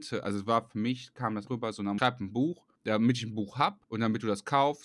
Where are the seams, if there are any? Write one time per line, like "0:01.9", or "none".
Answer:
0:01.5
0:02.0
0:02.8
0:03.8